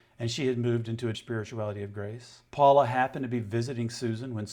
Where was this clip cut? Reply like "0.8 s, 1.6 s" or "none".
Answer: 1.1 s, 2.5 s